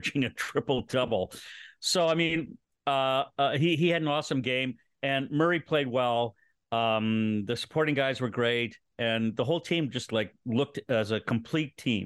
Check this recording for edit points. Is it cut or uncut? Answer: uncut